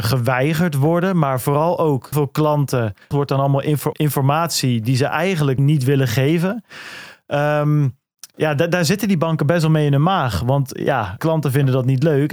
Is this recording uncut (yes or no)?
no